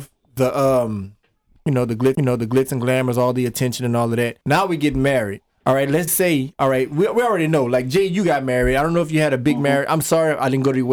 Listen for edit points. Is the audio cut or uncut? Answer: cut